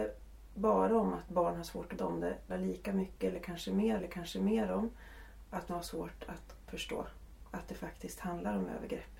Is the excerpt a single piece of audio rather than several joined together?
no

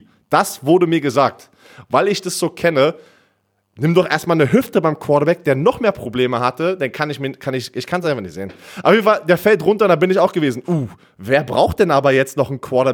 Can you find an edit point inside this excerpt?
no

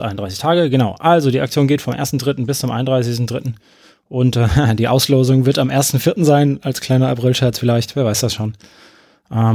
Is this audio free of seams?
yes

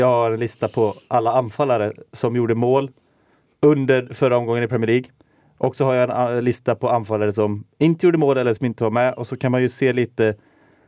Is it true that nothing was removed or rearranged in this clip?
yes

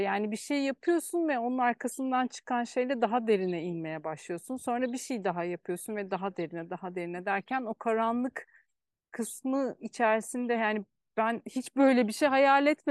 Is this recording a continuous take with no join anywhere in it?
yes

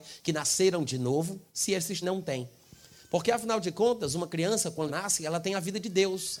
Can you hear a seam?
yes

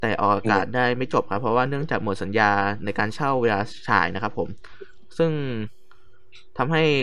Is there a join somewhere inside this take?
no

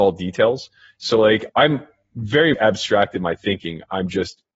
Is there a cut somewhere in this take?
yes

